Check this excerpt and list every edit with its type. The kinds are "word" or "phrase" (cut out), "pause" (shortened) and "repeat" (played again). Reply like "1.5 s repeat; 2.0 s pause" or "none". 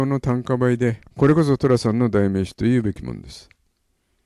1.1 s pause

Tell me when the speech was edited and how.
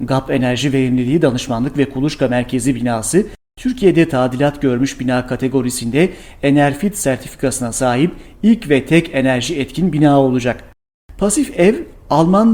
none

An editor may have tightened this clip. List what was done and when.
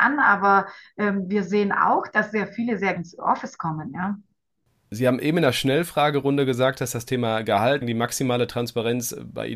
3.0 s word; 7.8 s word

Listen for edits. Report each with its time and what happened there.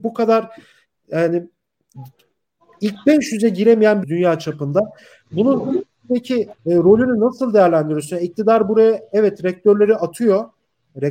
4.0 s phrase; 6.6 s pause

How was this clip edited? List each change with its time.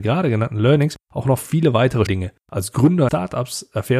1.0 s pause; 2.1 s word; 2.4 s pause; 3.1 s word

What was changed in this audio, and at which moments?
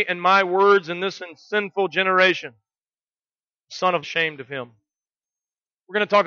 1.2 s word; 4.0 s phrase

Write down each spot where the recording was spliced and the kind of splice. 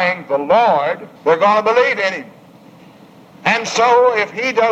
1.2 s pause

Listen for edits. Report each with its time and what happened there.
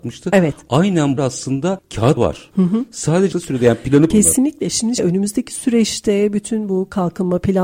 1.2 s phrase; 2.2 s word; 3.3 s phrase; 4.1 s phrase; 5.0 s word

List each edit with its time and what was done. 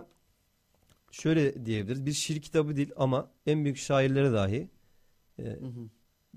none

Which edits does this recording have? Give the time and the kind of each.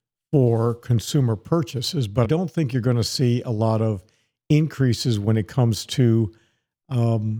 2.2 s word

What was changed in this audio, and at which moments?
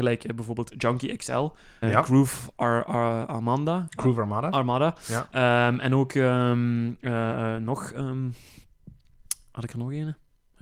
1.8 s word

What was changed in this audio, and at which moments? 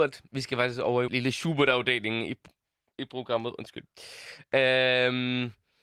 1.1 s word; 2.9 s word

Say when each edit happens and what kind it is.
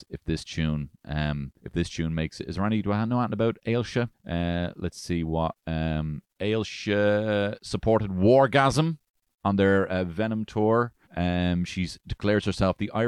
1.6 s pause; 4.1 s pause; 6.3 s pause; 11.0 s pause

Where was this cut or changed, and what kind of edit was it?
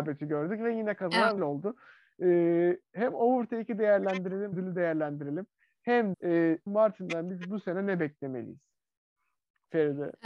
1.4 s word; 4.5 s word; 6.1 s word; 6.7 s word

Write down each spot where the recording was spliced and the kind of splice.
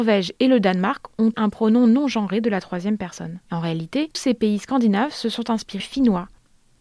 1.3 s word; 3.4 s pause; 4.1 s word; 5.8 s word

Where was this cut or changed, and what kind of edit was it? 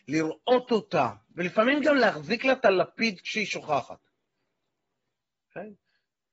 none

